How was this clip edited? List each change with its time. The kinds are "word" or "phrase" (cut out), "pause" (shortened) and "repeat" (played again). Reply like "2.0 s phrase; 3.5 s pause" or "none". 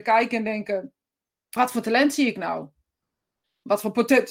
1.6 s word